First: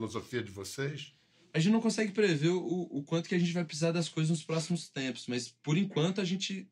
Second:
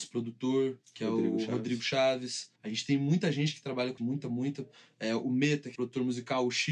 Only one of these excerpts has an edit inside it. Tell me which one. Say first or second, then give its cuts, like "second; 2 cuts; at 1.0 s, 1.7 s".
second; 3 cuts; at 2.6 s, 4.0 s, 5.8 s